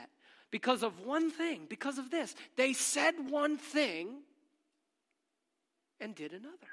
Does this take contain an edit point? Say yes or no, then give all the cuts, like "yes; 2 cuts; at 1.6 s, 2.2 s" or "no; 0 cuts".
no; 0 cuts